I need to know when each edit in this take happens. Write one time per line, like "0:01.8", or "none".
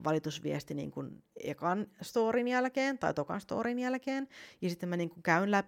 none